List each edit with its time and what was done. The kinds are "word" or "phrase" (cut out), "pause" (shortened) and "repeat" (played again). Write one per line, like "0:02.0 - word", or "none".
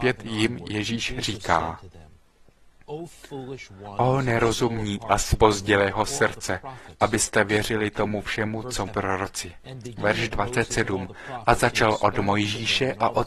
0:08.9 - word